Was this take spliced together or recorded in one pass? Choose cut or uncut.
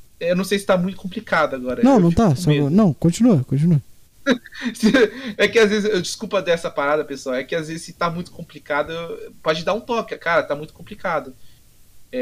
uncut